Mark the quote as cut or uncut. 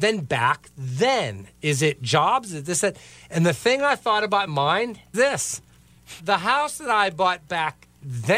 cut